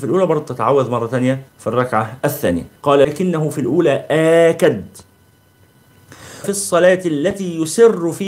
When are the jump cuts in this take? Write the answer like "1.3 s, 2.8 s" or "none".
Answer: 1.5 s, 2.8 s, 6.4 s